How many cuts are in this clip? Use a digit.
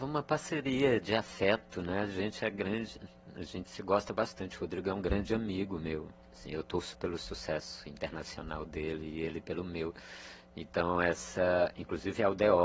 2